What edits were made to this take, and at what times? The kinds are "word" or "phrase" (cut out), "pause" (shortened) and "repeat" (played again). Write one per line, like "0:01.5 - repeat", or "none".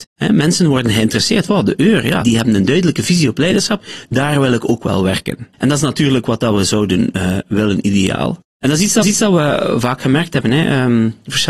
0:02.2 - word
0:05.5 - pause
0:06.5 - phrase
0:09.0 - repeat

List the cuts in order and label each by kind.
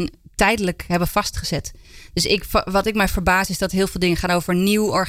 none

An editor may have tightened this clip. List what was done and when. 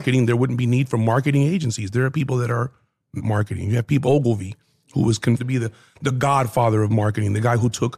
0:03.2 - word
0:04.0 - word
0:05.4 - word

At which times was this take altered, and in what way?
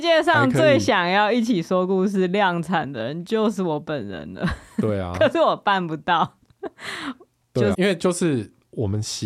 0:07.7 - word

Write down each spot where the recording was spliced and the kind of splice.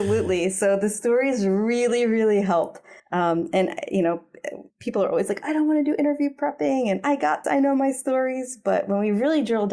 0:03.0 - pause
0:04.7 - pause
0:07.4 - word

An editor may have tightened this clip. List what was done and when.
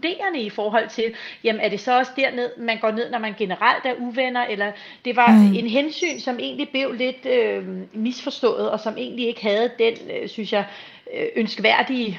none

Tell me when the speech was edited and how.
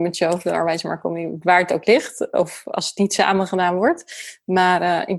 none

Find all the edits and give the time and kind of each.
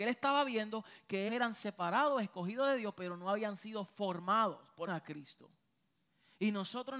0:01.3 - word
0:04.9 - phrase

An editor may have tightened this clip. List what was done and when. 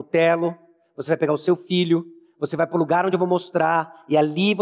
none

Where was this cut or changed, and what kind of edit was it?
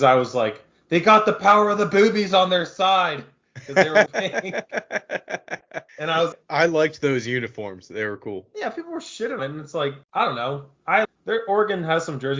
0:04.1 - phrase
0:05.9 - pause
0:06.3 - word
0:09.4 - word
0:10.0 - pause
0:11.0 - word

